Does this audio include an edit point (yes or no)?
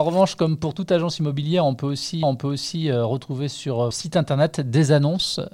yes